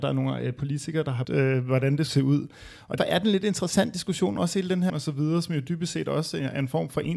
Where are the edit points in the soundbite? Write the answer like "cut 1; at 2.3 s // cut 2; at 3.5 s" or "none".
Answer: cut 1; at 1.2 s // cut 2; at 2.1 s // cut 3; at 3.0 s // cut 4; at 4.9 s